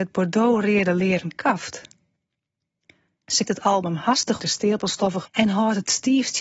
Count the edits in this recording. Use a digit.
3